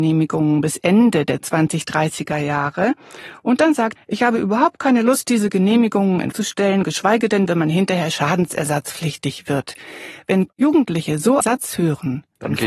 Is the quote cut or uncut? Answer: cut